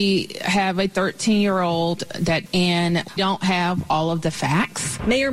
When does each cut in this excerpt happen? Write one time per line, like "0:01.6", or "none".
0:02.5
0:03.2